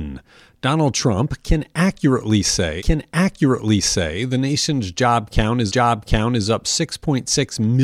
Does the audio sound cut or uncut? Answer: cut